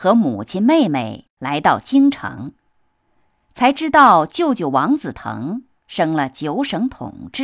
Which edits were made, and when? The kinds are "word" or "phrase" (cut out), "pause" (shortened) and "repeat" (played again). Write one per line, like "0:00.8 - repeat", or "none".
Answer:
none